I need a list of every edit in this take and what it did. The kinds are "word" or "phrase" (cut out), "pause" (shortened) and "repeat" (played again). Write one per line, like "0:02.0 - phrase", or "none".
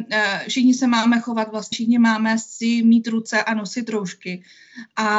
0:01.7 - word